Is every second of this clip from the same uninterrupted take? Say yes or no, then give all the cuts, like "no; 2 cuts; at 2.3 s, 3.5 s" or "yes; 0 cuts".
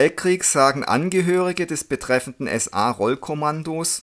yes; 0 cuts